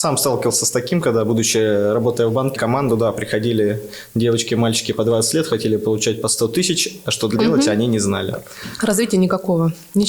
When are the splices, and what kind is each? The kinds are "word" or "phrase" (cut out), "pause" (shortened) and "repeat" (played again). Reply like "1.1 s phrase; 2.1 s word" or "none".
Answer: 2.6 s word; 7.4 s word